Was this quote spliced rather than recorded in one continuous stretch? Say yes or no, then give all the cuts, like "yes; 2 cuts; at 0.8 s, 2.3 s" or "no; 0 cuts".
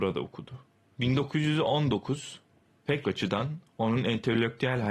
yes; 1 cut; at 3.0 s